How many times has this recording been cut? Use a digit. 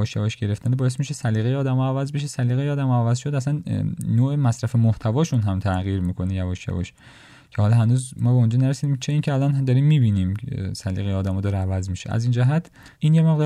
0